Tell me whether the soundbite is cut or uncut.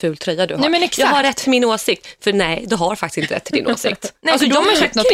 uncut